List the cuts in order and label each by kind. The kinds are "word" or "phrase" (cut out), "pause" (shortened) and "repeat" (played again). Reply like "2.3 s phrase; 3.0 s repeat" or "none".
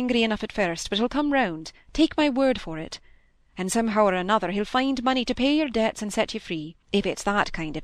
6.8 s pause